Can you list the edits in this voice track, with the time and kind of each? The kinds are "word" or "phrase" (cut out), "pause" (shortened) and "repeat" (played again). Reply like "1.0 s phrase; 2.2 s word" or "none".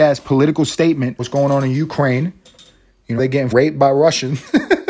1.2 s word; 3.2 s word; 3.5 s word